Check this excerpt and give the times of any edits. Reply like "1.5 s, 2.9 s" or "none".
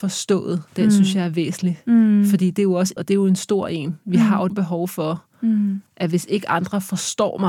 3.0 s, 4.5 s